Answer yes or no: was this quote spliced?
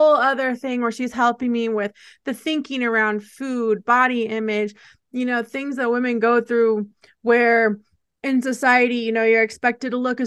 no